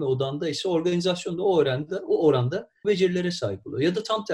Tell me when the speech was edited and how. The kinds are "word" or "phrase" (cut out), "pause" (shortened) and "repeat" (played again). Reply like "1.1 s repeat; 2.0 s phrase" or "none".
2.8 s word